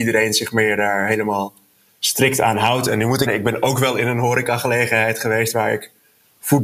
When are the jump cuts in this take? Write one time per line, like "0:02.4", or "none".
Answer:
0:03.3

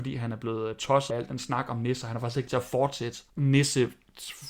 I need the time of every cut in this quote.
0:01.1
0:02.5
0:03.3

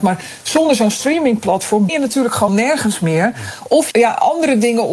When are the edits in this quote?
0:01.9
0:02.5
0:03.9

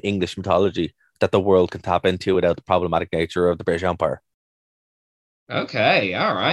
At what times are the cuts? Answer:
none

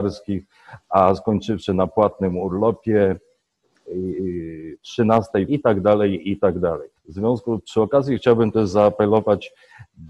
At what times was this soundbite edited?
0:05.5
0:07.0

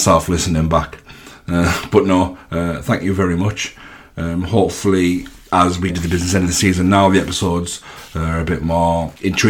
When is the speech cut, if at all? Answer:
0:05.9

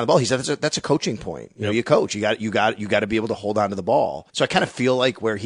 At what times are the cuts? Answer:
0:04.3

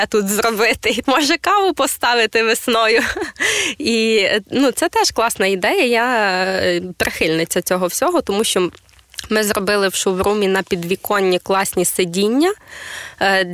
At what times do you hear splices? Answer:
0:01.0

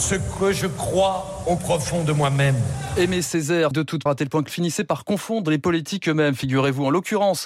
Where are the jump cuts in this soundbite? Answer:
0:01.6
0:03.7
0:04.1
0:04.5

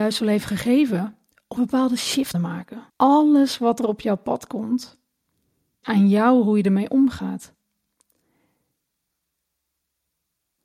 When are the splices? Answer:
0:01.6
0:02.3
0:02.9
0:05.8

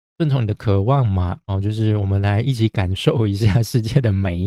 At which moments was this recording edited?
0:01.4

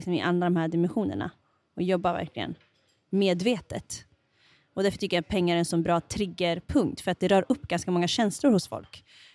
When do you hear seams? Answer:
none

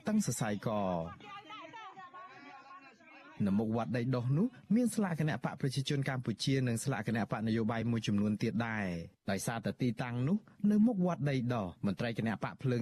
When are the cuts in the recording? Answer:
0:09.2
0:11.8

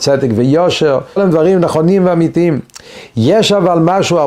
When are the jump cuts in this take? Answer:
0:01.2

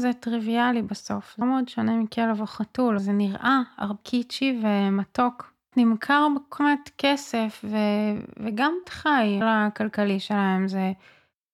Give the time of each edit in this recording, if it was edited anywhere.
0:01.4
0:03.0
0:04.0
0:05.7
0:06.6
0:08.8
0:09.4

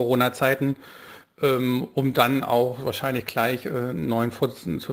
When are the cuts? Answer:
none

